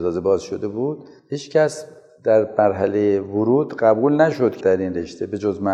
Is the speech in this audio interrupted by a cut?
yes; 1 cut; at 4.6 s

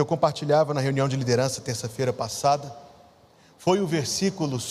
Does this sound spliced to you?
no; 0 cuts

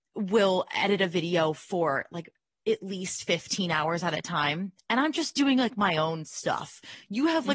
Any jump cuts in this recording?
no; 0 cuts

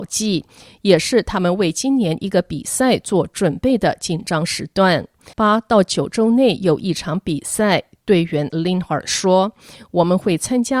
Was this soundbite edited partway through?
yes; 2 cuts; at 5.3 s, 8.5 s

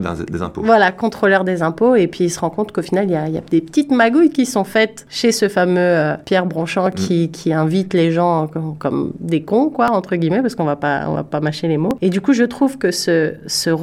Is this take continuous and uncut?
yes; 0 cuts

